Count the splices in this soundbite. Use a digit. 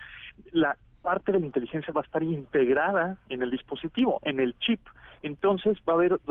1